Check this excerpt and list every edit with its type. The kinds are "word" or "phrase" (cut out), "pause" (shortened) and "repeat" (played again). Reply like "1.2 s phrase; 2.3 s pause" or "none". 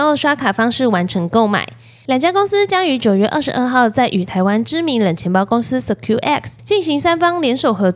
none

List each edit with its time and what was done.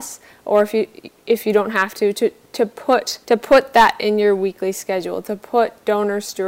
3.2 s pause

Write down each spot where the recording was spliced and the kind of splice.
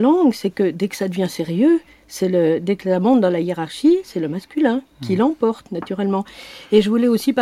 none

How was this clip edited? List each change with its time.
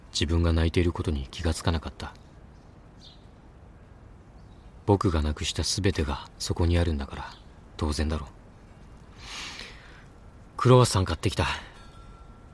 7.7 s pause

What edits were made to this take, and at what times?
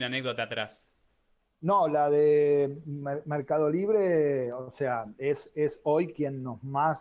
none

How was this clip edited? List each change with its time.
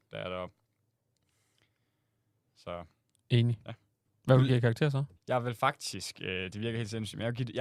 4.0 s pause; 5.2 s pause

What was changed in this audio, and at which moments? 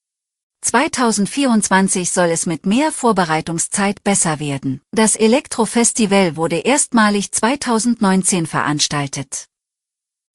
4.9 s pause

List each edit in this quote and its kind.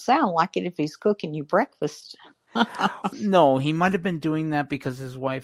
3.1 s word

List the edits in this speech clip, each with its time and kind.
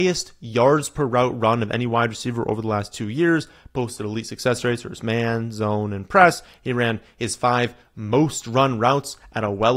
none

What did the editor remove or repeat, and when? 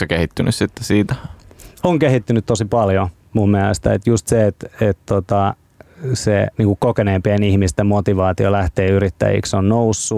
6.5 s pause

